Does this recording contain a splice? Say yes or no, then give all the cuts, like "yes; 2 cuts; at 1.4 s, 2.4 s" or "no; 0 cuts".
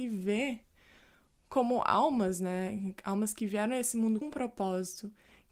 yes; 1 cut; at 4.2 s